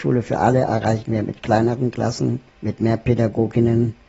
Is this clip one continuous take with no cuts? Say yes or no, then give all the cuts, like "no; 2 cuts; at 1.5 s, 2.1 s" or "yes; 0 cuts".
no; 1 cut; at 2.5 s